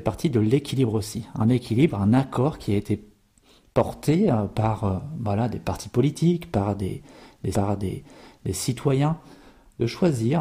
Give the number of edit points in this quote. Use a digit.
1